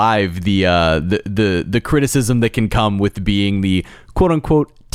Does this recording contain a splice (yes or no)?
no